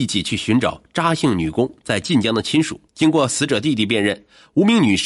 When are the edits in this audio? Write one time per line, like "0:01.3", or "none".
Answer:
0:02.9

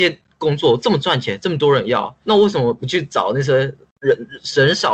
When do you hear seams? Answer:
0:02.2

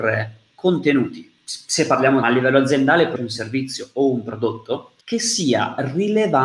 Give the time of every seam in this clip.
0:02.2
0:03.2
0:05.0

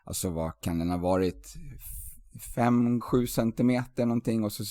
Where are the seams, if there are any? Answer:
0:03.0

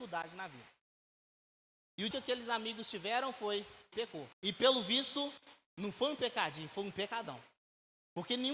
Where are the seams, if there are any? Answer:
0:02.1
0:03.9
0:04.3

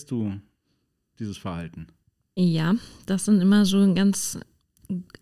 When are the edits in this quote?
0:02.0

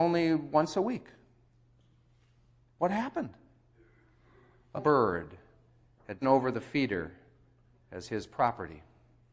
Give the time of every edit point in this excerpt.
0:04.8
0:06.2

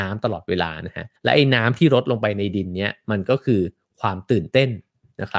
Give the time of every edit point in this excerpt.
0:01.2

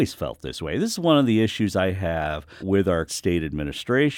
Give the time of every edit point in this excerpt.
0:02.6
0:03.1

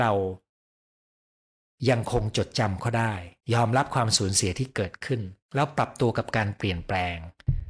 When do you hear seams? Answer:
0:03.4
0:05.4

